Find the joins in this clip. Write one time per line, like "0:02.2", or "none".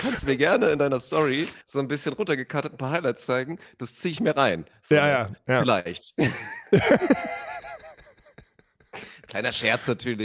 0:01.6